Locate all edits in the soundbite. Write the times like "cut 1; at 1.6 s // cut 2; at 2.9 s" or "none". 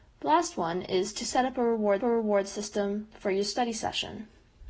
cut 1; at 2.0 s